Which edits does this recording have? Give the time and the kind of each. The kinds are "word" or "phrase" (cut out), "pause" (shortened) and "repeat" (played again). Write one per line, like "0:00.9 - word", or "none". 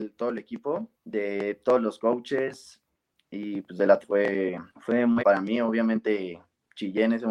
0:00.9 - pause
0:04.0 - word
0:04.7 - pause
0:05.2 - word

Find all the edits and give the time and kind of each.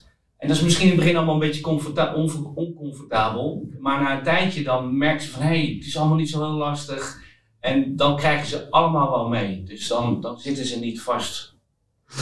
none

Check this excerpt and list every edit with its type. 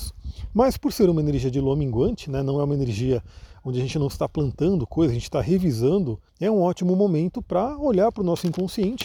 0:06.3 - pause

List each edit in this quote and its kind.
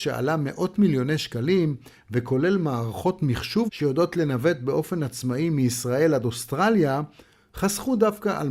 0:03.7 - word

